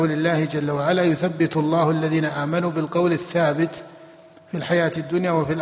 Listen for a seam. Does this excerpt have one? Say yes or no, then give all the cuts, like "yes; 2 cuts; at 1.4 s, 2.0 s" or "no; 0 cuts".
no; 0 cuts